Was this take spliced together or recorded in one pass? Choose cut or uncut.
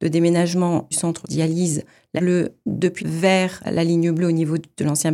cut